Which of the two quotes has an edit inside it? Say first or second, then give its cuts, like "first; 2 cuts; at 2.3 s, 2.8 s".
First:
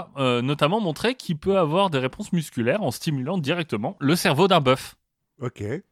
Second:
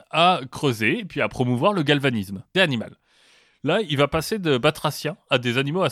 second; 1 cut; at 2.5 s